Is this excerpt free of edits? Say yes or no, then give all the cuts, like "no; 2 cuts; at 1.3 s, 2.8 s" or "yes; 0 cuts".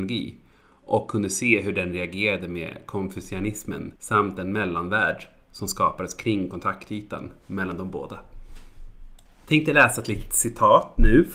no; 1 cut; at 4.0 s